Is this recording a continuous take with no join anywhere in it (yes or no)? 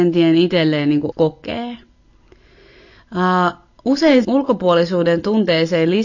no